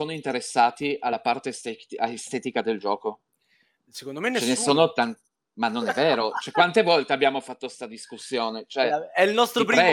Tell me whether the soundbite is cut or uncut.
uncut